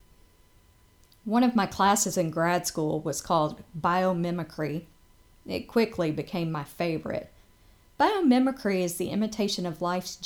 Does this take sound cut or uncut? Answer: uncut